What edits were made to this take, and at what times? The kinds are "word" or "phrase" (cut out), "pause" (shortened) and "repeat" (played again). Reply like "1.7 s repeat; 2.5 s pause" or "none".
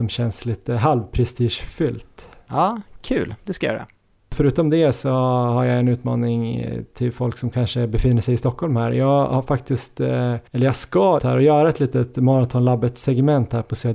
10.5 s pause; 11.2 s word